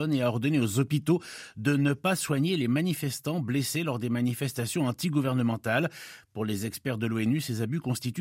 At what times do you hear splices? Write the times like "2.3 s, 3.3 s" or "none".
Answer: none